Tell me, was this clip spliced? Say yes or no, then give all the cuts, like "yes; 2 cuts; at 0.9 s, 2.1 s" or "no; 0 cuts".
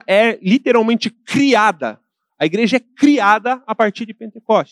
no; 0 cuts